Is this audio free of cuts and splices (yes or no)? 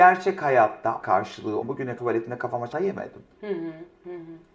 no